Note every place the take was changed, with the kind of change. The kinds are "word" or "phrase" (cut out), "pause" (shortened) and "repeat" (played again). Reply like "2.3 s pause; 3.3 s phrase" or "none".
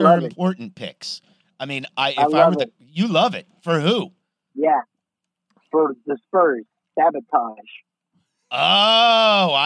none